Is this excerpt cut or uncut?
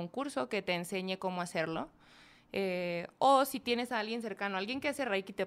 uncut